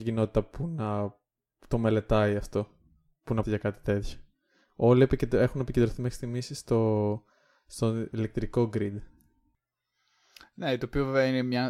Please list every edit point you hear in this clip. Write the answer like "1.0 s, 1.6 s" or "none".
3.4 s